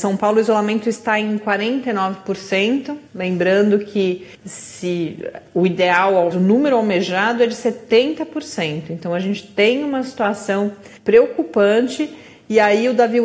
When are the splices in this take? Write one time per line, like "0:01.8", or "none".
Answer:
0:03.1
0:04.3
0:06.3
0:11.0